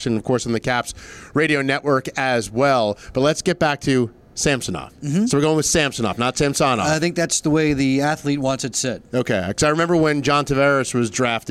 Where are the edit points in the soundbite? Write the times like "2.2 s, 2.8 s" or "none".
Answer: none